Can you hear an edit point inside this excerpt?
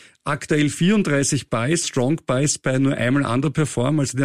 yes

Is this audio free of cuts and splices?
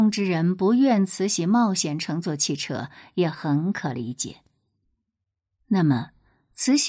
yes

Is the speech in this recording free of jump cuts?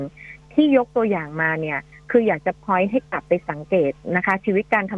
yes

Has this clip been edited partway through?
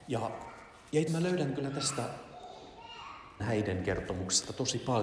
yes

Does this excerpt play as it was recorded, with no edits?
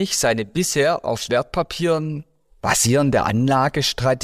yes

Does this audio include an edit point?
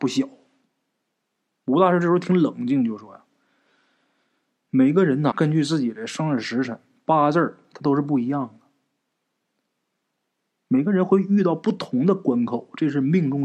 yes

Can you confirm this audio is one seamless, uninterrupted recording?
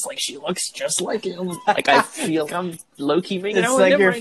no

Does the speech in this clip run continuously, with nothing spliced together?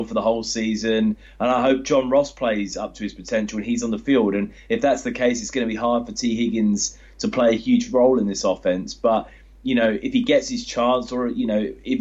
yes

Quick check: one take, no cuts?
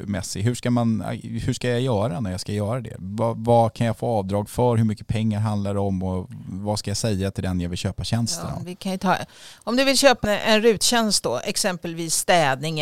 no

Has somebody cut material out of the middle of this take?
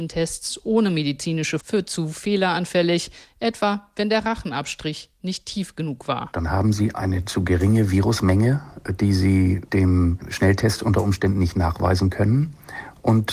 yes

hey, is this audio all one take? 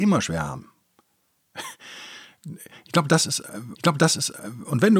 no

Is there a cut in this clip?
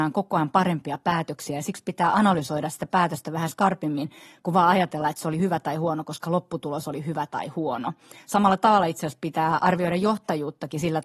no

